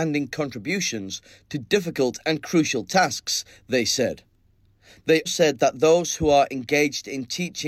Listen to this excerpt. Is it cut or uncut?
cut